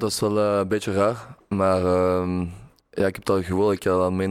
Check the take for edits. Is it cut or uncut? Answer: cut